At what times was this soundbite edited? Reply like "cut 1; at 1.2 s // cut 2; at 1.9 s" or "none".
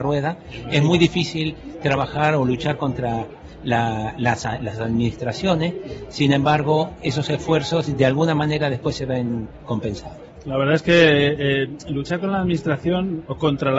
none